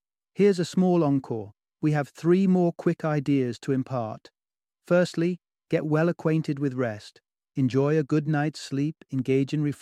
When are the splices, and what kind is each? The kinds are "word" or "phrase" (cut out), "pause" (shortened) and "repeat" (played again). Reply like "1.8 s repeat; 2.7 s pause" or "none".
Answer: none